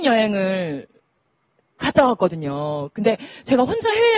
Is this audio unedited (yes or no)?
yes